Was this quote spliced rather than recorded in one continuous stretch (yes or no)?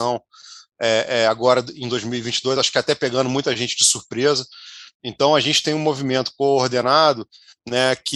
no